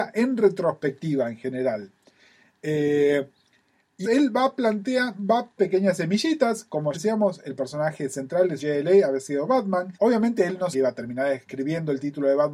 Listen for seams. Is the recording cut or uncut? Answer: cut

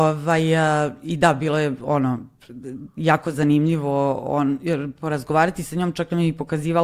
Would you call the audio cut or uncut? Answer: uncut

